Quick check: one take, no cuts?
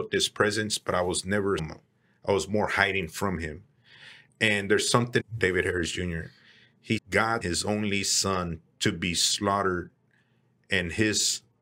no; 5 cuts; at 1.6 s, 5.2 s, 7.0 s, 7.4 s, 8.7 s

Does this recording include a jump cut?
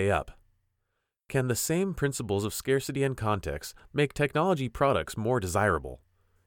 no; 0 cuts

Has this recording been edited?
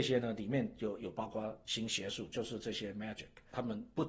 no; 0 cuts

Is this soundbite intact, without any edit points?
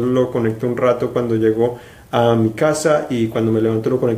yes; 0 cuts

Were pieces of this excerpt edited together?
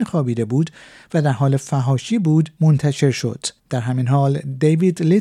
yes; 1 cut; at 3.6 s

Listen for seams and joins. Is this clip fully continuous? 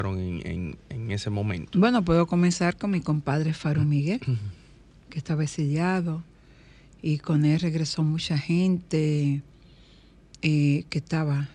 yes; 0 cuts

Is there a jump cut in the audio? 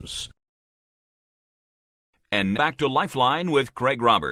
yes; 1 cut; at 2.5 s

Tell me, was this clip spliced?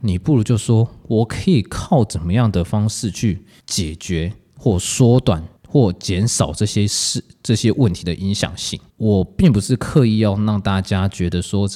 yes; 3 cuts; at 3.6 s, 5.6 s, 8.9 s

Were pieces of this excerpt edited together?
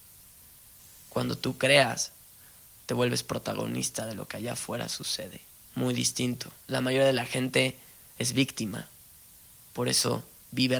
yes; 1 cut; at 5.6 s

